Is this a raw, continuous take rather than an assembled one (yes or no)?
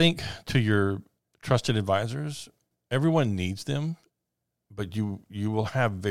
yes